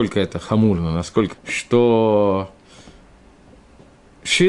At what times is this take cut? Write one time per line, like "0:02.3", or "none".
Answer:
0:01.3